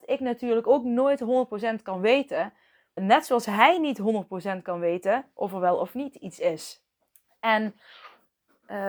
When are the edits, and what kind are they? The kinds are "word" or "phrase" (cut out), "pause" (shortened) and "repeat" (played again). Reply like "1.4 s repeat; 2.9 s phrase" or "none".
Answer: 3.0 s word; 7.0 s pause